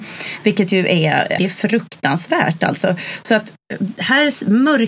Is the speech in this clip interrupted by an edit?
yes; 1 cut; at 1.4 s

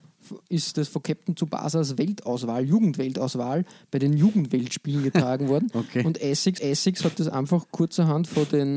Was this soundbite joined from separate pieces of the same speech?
yes; 1 cut; at 6.6 s

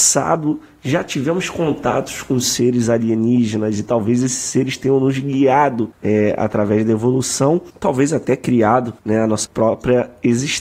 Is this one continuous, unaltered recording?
no; 1 cut; at 9.0 s

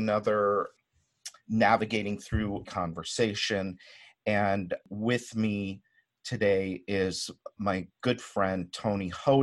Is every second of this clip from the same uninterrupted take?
no; 1 cut; at 2.6 s

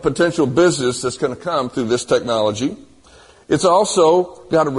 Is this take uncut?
yes; 0 cuts

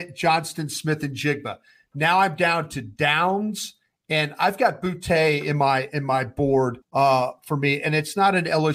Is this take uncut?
no; 1 cut; at 6.8 s

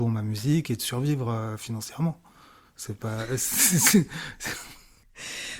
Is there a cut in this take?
no; 0 cuts

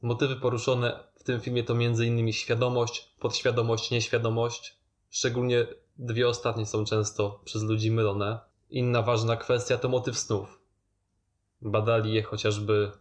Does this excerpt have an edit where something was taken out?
no; 0 cuts

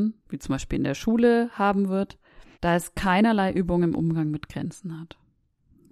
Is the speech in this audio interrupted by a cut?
yes; 1 cut; at 2.5 s

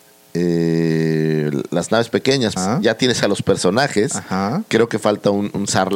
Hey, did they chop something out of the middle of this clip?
yes; 1 cut; at 2.6 s

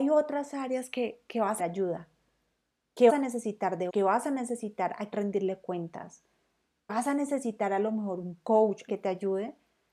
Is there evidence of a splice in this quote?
yes; 6 cuts; at 1.6 s, 3.1 s, 3.9 s, 5.1 s, 6.9 s, 8.9 s

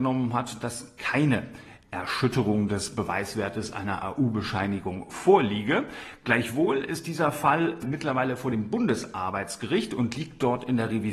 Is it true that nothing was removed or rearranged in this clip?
yes; 0 cuts

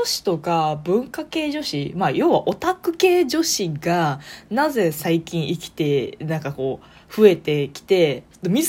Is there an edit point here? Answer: no; 0 cuts

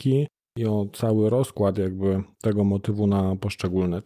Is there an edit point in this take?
yes; 1 cut; at 2.3 s

